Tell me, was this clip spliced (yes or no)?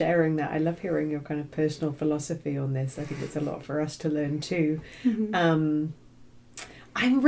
no